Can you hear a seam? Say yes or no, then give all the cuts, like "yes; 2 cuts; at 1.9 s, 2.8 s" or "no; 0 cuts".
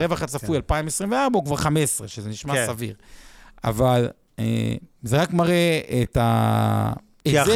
no; 0 cuts